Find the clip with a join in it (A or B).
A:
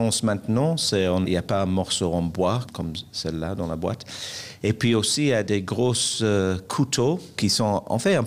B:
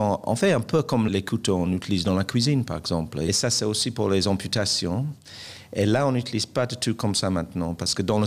B